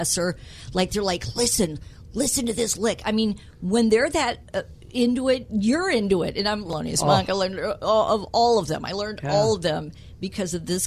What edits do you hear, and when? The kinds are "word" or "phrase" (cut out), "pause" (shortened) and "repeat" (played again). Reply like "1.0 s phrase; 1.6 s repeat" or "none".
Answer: none